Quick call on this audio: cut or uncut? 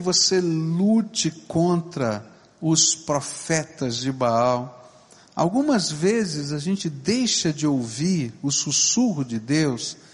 uncut